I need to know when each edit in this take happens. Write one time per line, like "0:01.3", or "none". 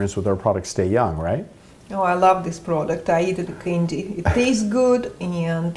0:03.5